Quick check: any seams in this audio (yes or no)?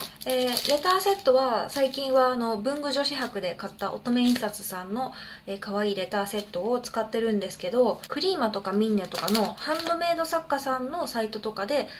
no